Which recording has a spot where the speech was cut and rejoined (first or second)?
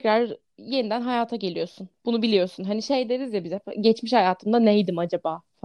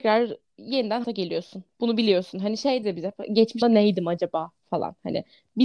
second